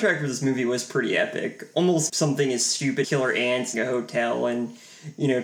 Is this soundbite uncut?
no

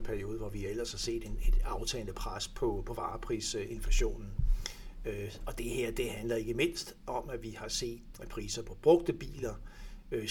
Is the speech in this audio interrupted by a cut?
yes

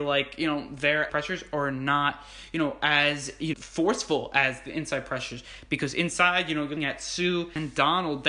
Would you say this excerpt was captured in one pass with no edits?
no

